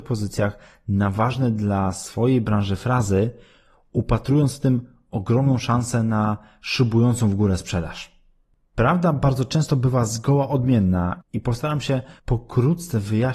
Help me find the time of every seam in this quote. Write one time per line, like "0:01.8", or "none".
0:12.2